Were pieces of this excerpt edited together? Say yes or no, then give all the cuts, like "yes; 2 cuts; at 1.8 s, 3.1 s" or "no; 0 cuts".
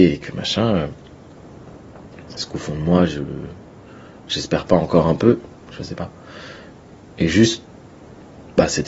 no; 0 cuts